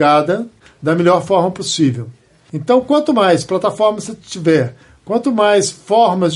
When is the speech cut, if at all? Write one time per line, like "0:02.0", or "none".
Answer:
none